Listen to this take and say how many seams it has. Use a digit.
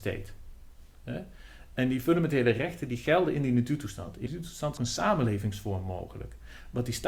2